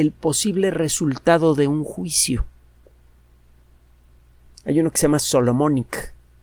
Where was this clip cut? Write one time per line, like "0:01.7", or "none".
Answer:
none